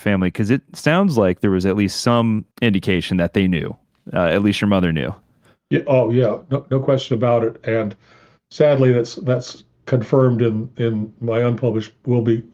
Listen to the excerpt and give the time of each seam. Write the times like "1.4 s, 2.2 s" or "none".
2.5 s